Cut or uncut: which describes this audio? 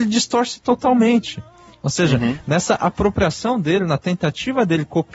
uncut